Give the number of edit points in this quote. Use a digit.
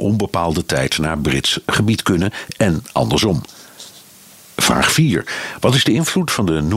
0